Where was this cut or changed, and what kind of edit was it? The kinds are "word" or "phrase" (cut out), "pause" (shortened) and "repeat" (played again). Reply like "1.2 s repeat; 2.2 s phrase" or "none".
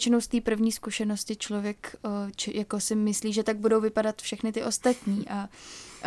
none